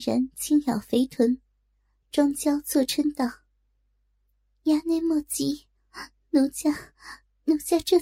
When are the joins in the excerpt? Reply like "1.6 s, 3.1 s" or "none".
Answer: none